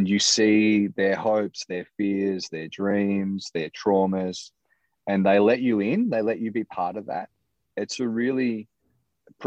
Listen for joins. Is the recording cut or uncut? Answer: uncut